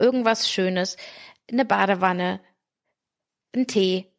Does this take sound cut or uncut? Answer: uncut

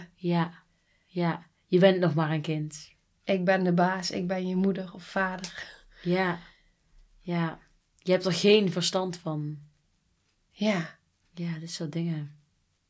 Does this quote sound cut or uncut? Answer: uncut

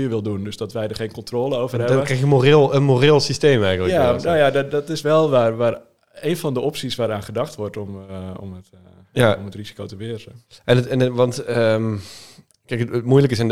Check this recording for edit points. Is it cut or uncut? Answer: uncut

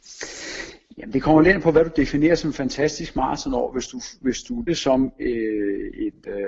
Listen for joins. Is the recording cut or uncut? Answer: cut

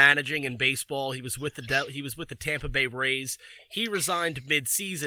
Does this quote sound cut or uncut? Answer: uncut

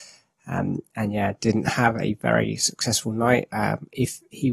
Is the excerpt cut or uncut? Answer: uncut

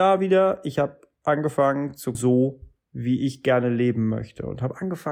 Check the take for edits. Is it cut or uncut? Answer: cut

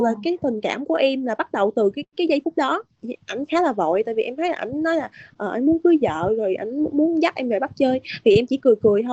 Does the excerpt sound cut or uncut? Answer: uncut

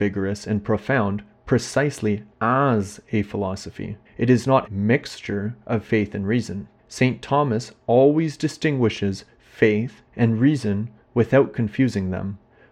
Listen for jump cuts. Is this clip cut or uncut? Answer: cut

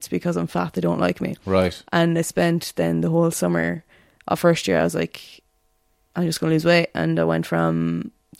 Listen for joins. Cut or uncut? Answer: uncut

